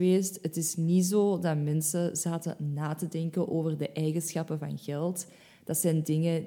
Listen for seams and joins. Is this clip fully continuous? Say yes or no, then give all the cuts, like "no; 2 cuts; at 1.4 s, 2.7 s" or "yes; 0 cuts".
yes; 0 cuts